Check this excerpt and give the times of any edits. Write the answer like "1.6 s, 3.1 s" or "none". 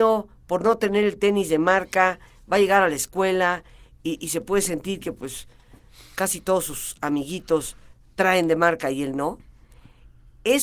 none

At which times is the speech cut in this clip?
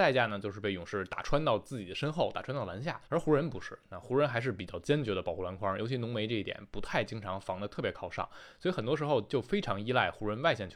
3.1 s

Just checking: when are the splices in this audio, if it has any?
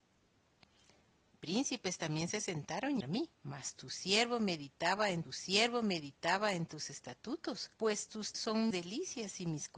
3.0 s, 3.4 s, 5.2 s, 7.7 s, 8.3 s, 8.7 s

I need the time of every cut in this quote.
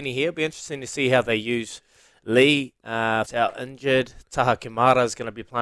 3.3 s

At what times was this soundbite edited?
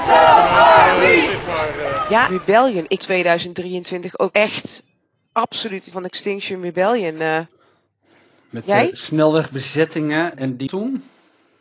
2.3 s, 3.0 s, 4.3 s, 5.9 s, 10.3 s, 10.7 s

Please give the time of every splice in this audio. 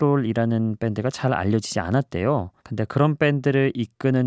2.6 s

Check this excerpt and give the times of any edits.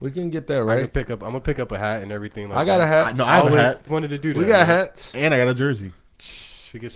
3.9 s

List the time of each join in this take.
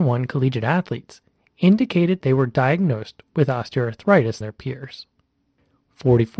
2.2 s, 4.4 s

